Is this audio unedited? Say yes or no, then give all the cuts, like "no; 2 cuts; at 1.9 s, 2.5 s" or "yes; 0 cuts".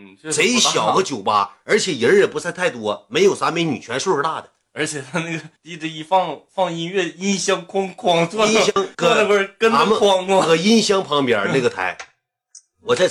no; 2 cuts; at 5.6 s, 8.9 s